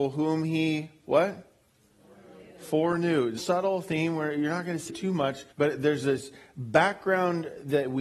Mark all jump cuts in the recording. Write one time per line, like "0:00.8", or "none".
0:03.4
0:04.9
0:05.5

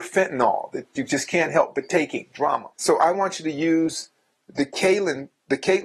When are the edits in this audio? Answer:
0:02.7

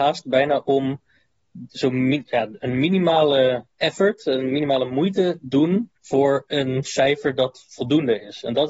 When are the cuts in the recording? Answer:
0:03.7
0:06.0

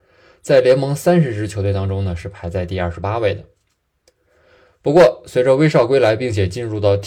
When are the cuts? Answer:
none

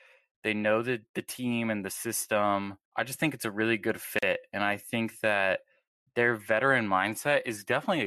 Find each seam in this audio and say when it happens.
0:02.9

